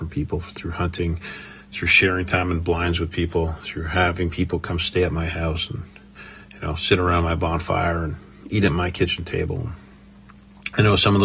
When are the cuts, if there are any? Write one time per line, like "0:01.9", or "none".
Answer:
none